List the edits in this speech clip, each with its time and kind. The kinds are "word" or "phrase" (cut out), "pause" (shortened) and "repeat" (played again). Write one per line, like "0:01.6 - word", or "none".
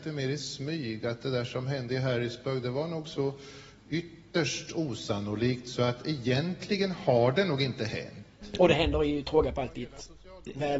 none